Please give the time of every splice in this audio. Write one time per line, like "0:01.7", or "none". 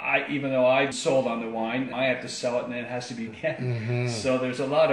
0:00.9
0:01.9
0:03.3